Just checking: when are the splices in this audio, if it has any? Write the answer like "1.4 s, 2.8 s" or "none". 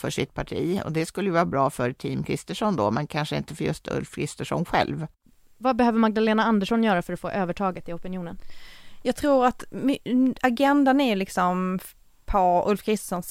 none